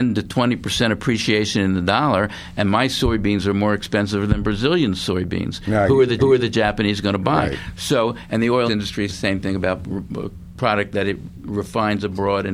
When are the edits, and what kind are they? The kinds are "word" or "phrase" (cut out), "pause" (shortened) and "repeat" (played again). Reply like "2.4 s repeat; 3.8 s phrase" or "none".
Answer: 6.2 s repeat; 8.7 s phrase; 9.1 s word

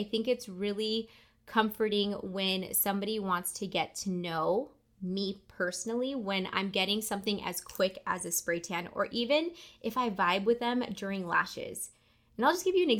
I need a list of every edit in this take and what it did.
none

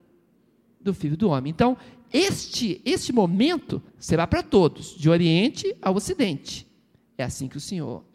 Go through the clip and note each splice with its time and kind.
3.9 s pause

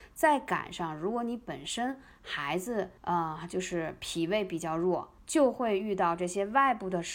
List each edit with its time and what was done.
3.0 s pause; 5.2 s pause

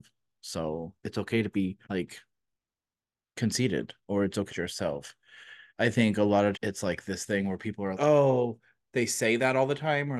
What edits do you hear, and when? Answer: 1.0 s pause; 1.8 s pause; 4.0 s pause; 4.5 s phrase; 5.7 s pause; 6.5 s word; 7.9 s word

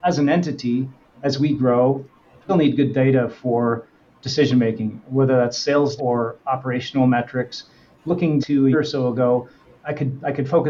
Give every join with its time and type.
2.5 s word; 6.0 s word; 8.4 s word; 8.7 s word; 9.7 s word

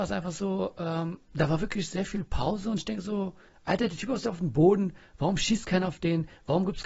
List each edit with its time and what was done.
3.5 s pause

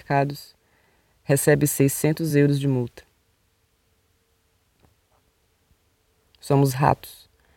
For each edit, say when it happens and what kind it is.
none

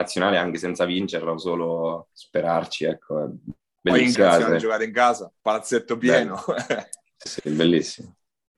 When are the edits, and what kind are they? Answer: 2.1 s pause; 4.1 s phrase; 5.4 s pause; 7.3 s word

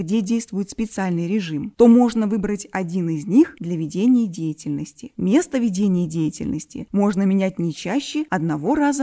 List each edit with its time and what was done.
none

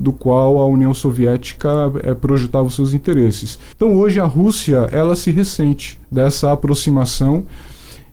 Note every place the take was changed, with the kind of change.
3.7 s pause; 6.0 s pause

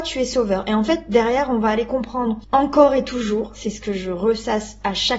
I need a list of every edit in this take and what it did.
2.4 s pause

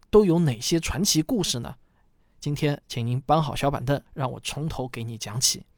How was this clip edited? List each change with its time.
4.1 s pause

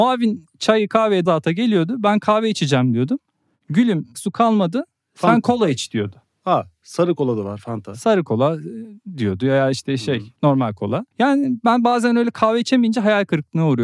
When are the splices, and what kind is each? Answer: 1.3 s word; 4.1 s word; 10.4 s pause; 11.1 s pause

